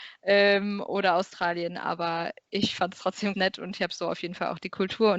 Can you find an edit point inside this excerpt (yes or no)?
yes